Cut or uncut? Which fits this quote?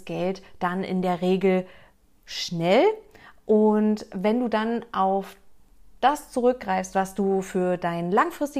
uncut